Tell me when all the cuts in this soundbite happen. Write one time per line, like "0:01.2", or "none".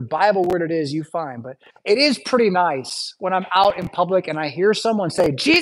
0:01.7